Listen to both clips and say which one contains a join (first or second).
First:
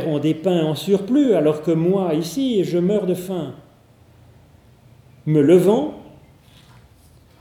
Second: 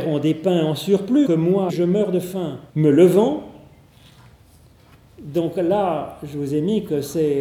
second